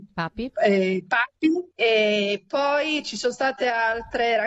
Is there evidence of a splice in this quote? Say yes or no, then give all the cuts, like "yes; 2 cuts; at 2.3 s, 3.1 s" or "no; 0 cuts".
yes; 1 cut; at 1.7 s